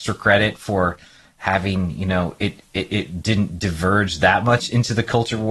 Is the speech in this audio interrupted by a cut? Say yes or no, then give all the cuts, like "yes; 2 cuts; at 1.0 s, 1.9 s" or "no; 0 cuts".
no; 0 cuts